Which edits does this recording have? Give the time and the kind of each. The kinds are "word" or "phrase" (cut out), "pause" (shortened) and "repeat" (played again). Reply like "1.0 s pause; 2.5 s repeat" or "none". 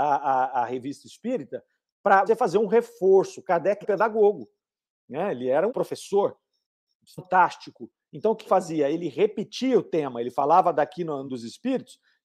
2.3 s word; 3.8 s word; 5.7 s word; 8.5 s word; 11.3 s word